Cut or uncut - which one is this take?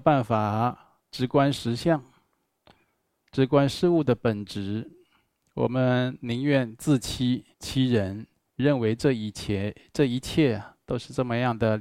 cut